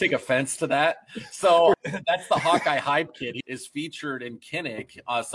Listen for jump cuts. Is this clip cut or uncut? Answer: cut